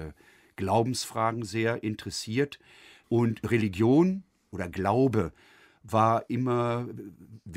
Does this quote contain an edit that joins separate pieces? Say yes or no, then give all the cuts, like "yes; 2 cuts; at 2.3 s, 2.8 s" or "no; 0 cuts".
no; 0 cuts